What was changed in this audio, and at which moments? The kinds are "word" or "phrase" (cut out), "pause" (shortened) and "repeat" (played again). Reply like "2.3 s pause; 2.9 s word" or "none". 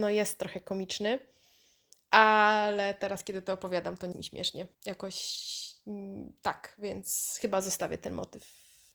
4.1 s word; 4.7 s pause